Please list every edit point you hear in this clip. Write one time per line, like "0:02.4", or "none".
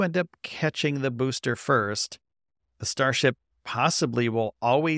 none